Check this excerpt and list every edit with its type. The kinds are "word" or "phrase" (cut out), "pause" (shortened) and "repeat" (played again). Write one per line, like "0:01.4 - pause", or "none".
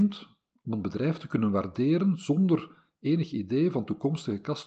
none

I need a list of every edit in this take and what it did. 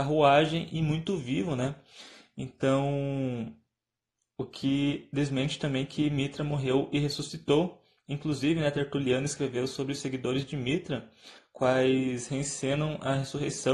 none

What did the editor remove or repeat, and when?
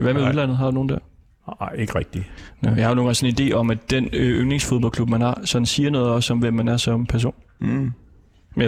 none

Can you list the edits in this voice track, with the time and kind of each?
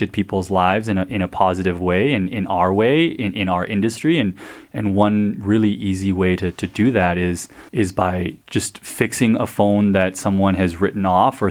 0:07.7 - pause
0:08.4 - pause

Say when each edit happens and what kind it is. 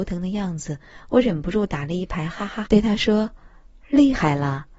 0:02.7 - word

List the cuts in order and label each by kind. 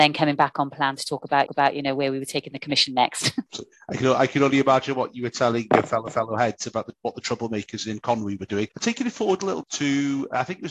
0:01.5 - repeat
0:03.5 - pause
0:06.1 - repeat
0:08.7 - pause
0:09.6 - word

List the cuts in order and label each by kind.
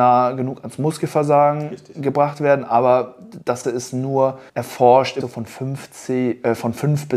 0:03.6 - word
0:04.5 - pause
0:05.2 - word

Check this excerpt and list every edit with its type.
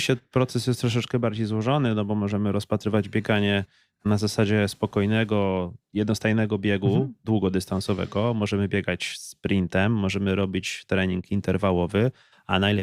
none

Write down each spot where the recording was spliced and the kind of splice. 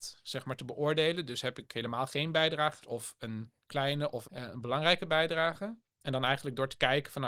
0:02.8 - word
0:04.2 - word

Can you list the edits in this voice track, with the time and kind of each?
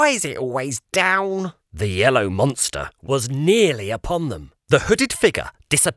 0:04.6 - pause

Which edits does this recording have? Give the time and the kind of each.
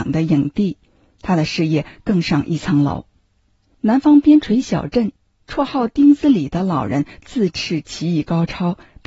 none

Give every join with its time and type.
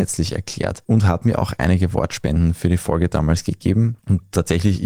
none

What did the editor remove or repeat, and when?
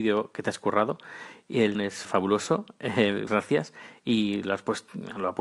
0:01.7 - word
0:02.0 - word
0:03.3 - word

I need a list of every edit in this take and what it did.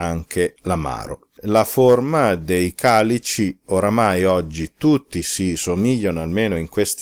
0:01.4 - pause

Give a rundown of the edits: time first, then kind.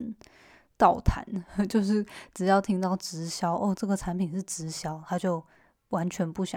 none

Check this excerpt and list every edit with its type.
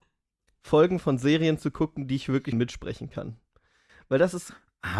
0:02.5 - word

